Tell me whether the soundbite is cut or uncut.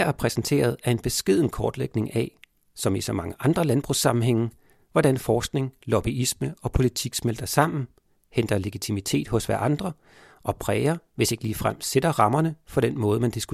uncut